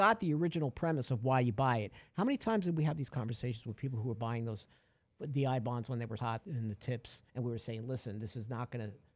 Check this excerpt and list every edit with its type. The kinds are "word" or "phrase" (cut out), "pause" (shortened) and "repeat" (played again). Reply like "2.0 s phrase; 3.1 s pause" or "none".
6.2 s word; 7.3 s pause

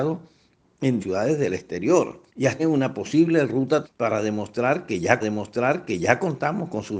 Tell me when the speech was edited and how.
1.0 s word; 2.3 s pause; 2.6 s word; 3.8 s word; 5.2 s repeat

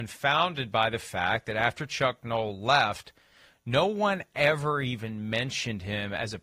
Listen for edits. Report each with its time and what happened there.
none

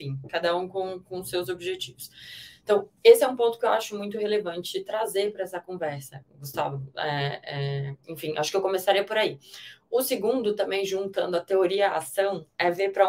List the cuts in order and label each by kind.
none

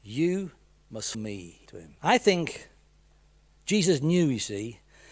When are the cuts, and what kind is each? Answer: 1.1 s word; 1.7 s word; 2.0 s pause

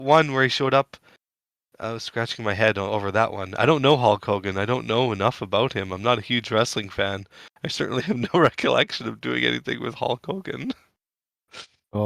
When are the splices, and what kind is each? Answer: none

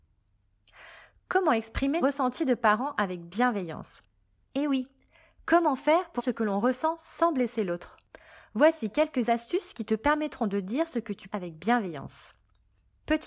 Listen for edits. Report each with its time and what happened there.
2.0 s word; 6.2 s word; 11.3 s word

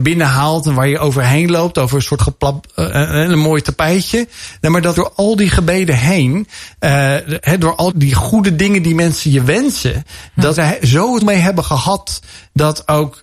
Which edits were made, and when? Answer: 2.2 s word; 5.0 s word; 7.9 s word; 10.6 s word; 11.2 s word

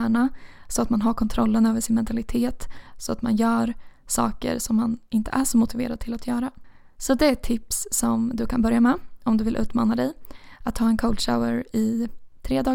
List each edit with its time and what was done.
none

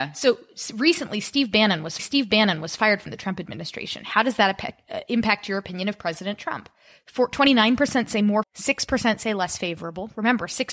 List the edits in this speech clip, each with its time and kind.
2.0 s repeat; 8.4 s word

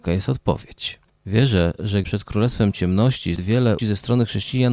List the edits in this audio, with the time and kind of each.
2.0 s phrase; 3.4 s word; 3.8 s word

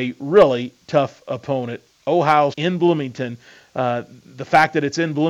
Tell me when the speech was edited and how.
2.5 s word

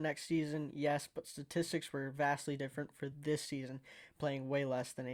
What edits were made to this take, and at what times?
none

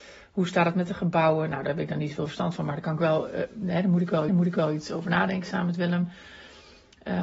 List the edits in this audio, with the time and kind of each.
4.3 s repeat

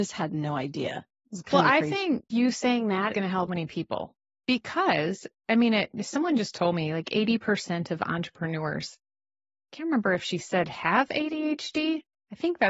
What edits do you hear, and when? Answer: 2.3 s word; 3.1 s word; 3.5 s word

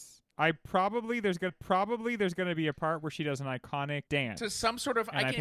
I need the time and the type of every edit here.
1.5 s repeat; 4.1 s pause

